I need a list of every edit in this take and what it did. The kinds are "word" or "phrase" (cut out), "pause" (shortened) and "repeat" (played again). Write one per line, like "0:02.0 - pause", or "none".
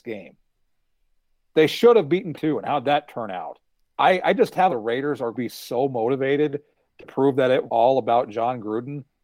0:02.3 - word
0:03.7 - pause
0:04.7 - phrase
0:05.3 - phrase
0:07.7 - word